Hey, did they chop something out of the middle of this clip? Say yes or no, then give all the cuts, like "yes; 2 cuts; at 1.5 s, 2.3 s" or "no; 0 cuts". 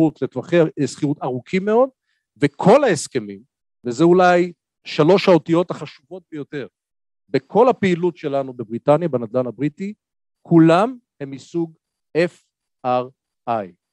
no; 0 cuts